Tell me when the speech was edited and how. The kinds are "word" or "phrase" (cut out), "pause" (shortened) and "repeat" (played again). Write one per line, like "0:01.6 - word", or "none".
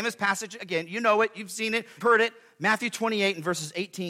0:02.0 - word

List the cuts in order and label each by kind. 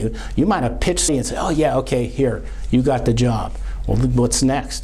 0:01.1 - word

